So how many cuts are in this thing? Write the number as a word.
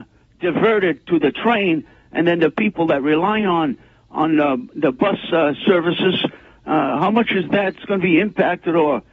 zero